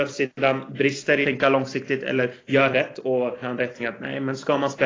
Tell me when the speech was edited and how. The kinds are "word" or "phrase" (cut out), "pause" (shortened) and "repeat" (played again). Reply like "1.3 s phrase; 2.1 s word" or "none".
1.2 s word; 2.7 s word; 3.4 s word; 3.8 s word